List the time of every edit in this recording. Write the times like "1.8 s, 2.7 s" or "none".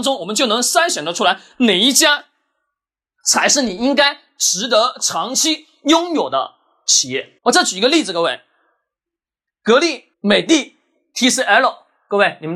7.4 s, 10.1 s